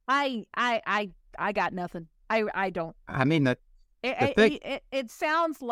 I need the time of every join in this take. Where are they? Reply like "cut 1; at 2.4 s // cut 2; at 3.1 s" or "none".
none